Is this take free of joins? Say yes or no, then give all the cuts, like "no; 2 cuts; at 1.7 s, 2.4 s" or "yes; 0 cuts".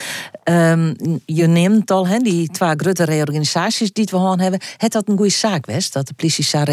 yes; 0 cuts